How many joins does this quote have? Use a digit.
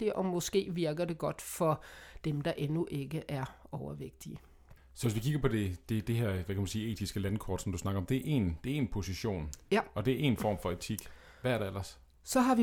1